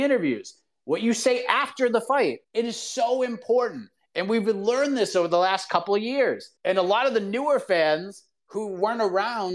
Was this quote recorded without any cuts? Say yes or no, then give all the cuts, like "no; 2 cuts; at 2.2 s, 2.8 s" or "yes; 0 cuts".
no; 2 cuts; at 2.4 s, 6.6 s